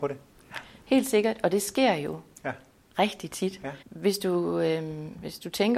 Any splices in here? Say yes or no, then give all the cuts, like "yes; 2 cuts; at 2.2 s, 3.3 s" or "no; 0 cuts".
yes; 1 cut; at 3.8 s